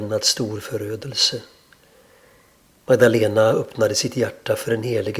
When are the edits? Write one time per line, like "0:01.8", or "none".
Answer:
none